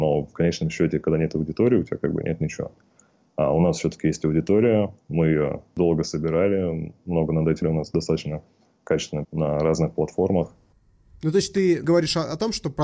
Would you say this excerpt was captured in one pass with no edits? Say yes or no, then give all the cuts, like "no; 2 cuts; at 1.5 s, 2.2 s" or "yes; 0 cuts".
no; 2 cuts; at 7.6 s, 9.2 s